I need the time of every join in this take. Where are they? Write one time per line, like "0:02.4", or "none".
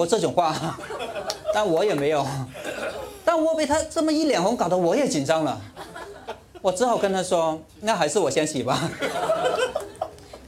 0:07.7